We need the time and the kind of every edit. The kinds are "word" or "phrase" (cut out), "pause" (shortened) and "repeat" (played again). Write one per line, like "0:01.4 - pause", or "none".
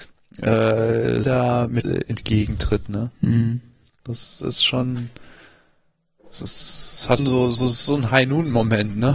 0:01.2 - word
0:01.8 - word
0:03.9 - pause
0:07.2 - word